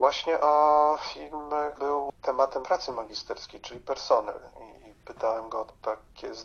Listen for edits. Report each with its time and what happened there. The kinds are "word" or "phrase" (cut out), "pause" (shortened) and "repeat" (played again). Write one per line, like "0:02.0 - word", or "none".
0:01.8 - word
0:02.6 - word